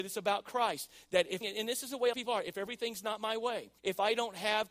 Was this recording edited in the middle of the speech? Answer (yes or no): yes